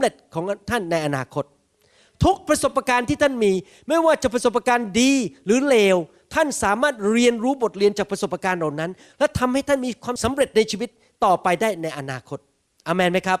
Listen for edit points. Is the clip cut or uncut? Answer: uncut